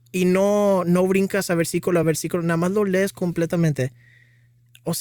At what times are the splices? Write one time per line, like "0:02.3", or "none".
none